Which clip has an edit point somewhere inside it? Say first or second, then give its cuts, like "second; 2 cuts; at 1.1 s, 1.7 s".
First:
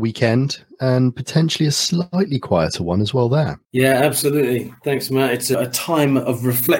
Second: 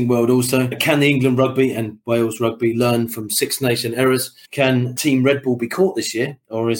first; 1 cut; at 3.6 s